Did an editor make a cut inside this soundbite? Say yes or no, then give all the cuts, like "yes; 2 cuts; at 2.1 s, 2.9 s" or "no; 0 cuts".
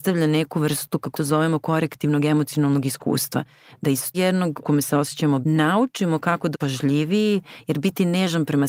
yes; 5 cuts; at 1.1 s, 4.1 s, 4.6 s, 5.4 s, 6.5 s